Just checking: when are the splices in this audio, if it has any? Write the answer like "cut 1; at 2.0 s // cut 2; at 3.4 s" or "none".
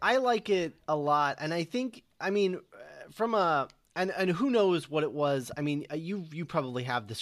none